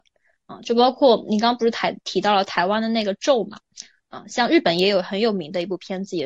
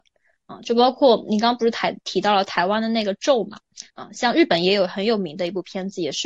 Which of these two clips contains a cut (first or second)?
second